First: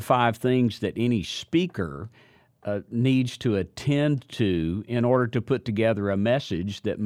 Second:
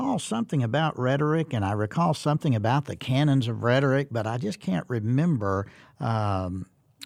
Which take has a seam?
second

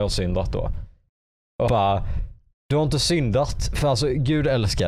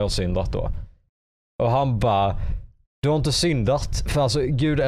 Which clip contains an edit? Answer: first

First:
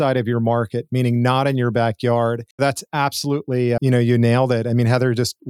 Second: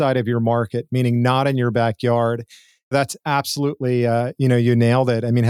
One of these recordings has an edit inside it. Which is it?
first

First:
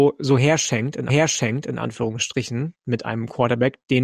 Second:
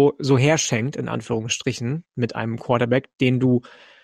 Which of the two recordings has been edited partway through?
first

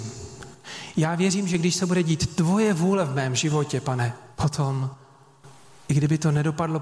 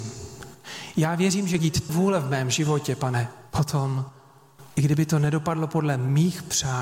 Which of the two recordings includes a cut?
second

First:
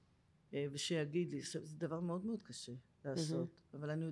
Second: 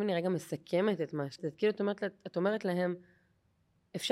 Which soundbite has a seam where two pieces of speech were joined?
second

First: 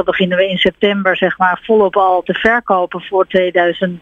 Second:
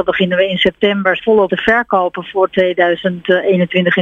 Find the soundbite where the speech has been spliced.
second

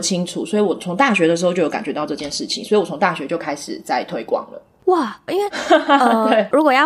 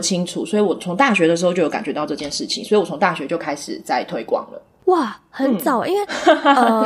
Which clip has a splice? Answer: first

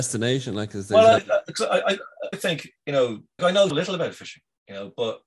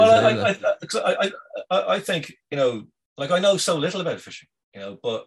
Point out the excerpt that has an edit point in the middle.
first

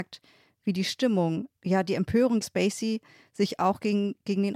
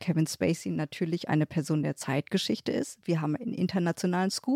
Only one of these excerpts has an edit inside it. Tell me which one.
first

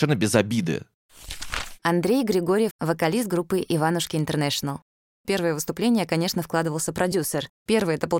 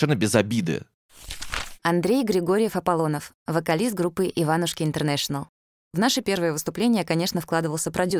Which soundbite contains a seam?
first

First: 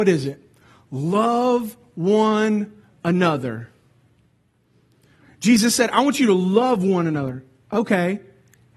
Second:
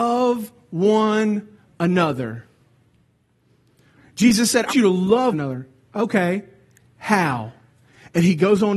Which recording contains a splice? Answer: second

